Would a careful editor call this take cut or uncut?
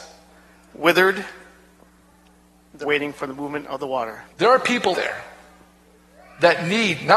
cut